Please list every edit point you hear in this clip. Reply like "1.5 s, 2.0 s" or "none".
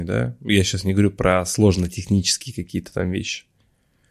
none